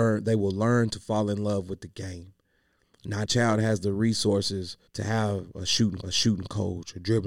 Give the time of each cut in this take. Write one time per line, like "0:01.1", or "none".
0:03.3
0:04.9
0:06.0